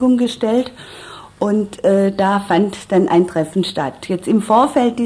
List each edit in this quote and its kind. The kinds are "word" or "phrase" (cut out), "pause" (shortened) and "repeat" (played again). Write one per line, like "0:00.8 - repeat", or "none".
none